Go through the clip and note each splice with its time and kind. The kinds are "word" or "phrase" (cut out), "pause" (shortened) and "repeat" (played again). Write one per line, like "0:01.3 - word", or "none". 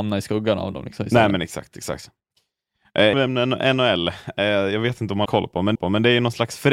0:03.1 - word
0:05.3 - word
0:05.8 - repeat

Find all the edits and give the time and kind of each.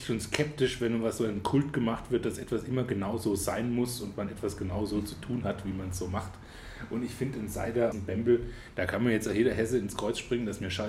0:07.9 - word

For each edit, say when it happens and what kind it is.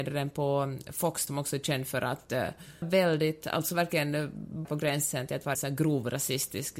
0:01.3 - word
0:02.8 - word
0:04.6 - word
0:05.5 - word

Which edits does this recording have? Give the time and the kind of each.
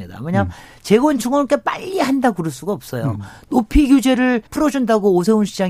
0:04.5 - pause

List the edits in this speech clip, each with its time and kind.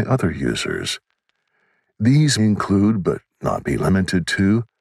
0:02.4 - word

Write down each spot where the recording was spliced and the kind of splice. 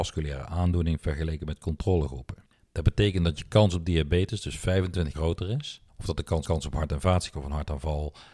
0:02.5 - pause
0:05.1 - word
0:05.9 - pause
0:06.4 - repeat
0:07.3 - phrase

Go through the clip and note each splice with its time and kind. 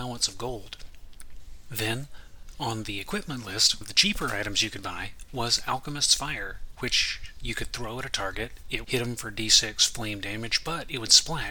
0:03.8 - word
0:08.8 - word

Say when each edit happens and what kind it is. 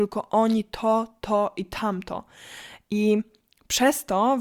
none

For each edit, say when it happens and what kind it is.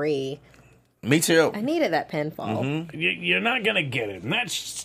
none

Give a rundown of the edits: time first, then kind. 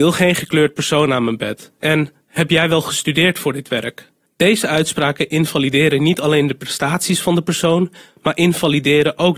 none

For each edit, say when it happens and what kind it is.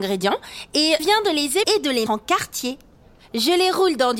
0:01.0 - word
0:01.6 - word
0:02.1 - word

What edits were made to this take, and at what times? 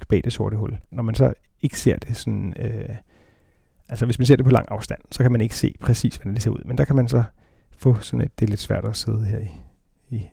none

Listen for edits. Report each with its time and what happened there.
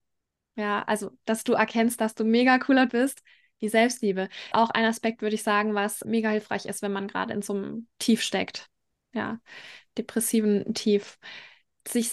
0:02.9 - word
0:04.5 - word
0:06.0 - word

